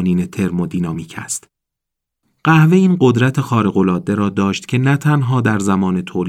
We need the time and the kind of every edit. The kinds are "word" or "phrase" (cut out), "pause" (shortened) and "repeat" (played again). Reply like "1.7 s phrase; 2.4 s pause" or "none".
none